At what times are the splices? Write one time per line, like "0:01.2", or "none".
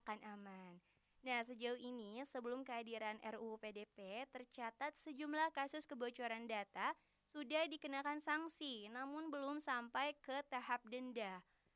none